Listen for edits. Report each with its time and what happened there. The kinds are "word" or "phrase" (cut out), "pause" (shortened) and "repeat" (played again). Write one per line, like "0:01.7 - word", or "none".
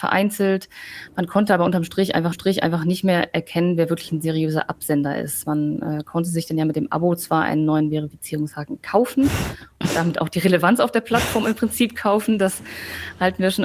0:02.3 - repeat